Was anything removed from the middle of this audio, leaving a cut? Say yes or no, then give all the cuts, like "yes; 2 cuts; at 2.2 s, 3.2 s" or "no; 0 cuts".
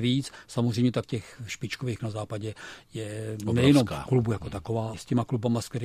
yes; 3 cuts; at 1.0 s, 2.0 s, 4.9 s